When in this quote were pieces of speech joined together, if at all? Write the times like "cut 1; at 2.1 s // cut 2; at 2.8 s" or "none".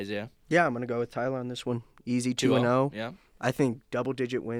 none